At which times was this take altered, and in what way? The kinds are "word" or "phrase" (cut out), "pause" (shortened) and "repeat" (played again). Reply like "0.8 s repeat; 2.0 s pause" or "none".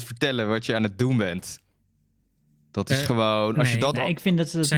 none